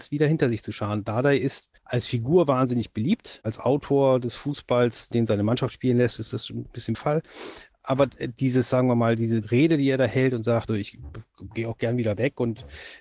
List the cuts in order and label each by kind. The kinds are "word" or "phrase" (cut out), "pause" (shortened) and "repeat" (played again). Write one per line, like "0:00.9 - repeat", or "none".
0:01.8 - pause
0:05.1 - word
0:06.9 - phrase
0:10.7 - word